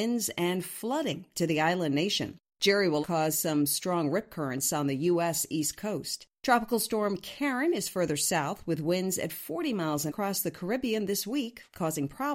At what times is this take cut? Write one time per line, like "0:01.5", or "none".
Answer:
0:03.0
0:06.4
0:10.1

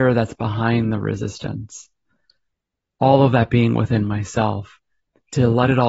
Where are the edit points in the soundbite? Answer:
none

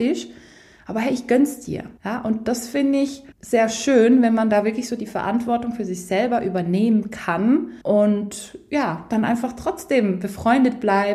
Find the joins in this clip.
0:02.0
0:03.3
0:07.8

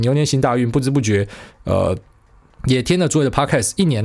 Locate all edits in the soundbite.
none

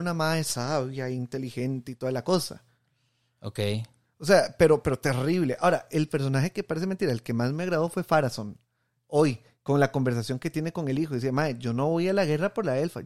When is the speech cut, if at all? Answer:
none

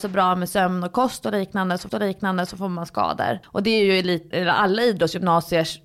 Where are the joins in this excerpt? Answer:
0:01.9
0:03.4
0:04.3

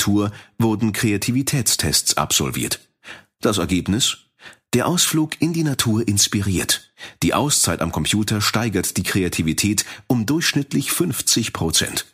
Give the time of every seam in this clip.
none

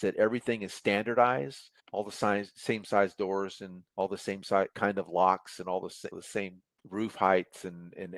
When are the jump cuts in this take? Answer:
0:01.8
0:03.9

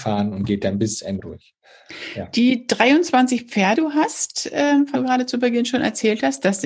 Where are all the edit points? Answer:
0:01.2
0:03.8
0:04.9

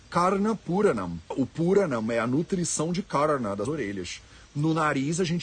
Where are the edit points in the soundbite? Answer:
0:01.3
0:03.7

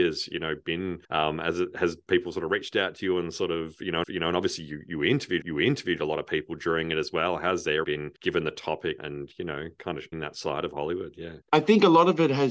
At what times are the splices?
0:01.0
0:04.0
0:05.4
0:07.8
0:08.2
0:09.0
0:10.1
0:11.4

